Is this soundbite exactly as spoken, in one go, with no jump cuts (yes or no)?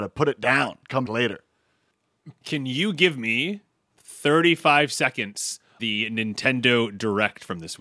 no